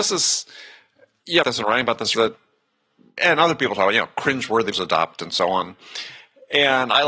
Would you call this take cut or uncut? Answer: cut